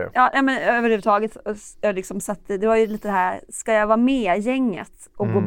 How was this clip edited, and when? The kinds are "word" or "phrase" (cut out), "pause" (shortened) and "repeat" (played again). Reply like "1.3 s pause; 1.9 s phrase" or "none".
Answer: 1.7 s pause